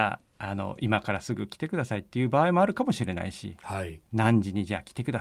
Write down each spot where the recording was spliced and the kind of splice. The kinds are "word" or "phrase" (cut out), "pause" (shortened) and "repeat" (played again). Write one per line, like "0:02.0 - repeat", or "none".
none